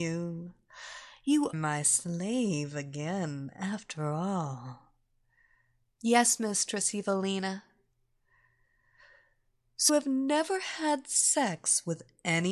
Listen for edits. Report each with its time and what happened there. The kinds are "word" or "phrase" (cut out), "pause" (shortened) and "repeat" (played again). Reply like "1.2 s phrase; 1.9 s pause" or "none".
1.5 s word; 9.9 s word

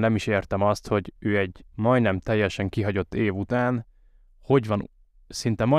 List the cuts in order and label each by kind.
none

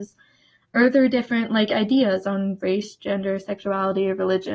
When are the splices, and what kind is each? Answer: none

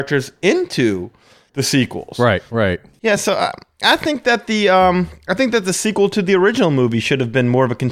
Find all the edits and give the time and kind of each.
none

